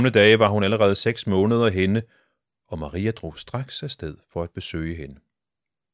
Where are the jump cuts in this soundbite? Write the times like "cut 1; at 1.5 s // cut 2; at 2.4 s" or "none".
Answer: none